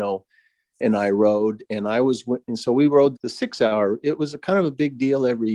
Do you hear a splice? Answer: yes; 1 cut; at 3.2 s

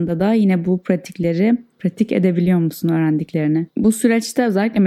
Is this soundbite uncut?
no; 1 cut; at 3.7 s

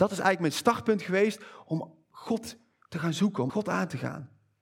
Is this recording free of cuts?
no; 1 cut; at 3.5 s

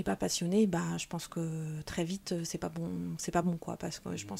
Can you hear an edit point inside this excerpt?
no; 0 cuts

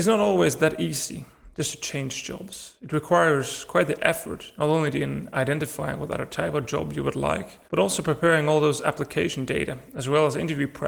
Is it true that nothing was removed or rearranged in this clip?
no; 1 cut; at 7.7 s

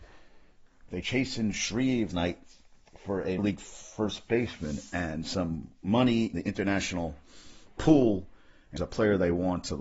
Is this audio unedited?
no; 5 cuts; at 1.0 s, 2.1 s, 3.4 s, 6.3 s, 8.8 s

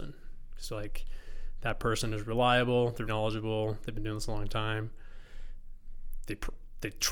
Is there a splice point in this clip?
yes; 1 cut; at 3.1 s

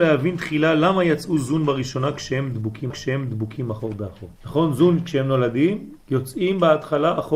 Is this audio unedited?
no; 3 cuts; at 2.9 s, 4.4 s, 6.0 s

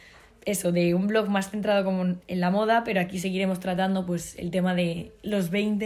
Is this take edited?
no; 0 cuts

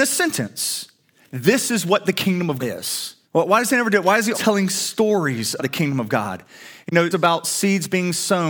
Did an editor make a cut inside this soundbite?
yes; 6 cuts; at 1.2 s, 2.6 s, 3.2 s, 4.3 s, 5.6 s, 7.1 s

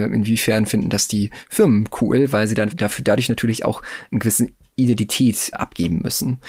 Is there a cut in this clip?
yes; 2 cuts; at 2.7 s, 5.5 s

